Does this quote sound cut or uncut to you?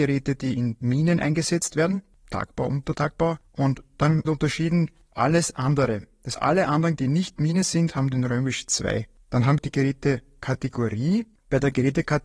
cut